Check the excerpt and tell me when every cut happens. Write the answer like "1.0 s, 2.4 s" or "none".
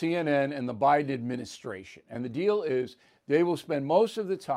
none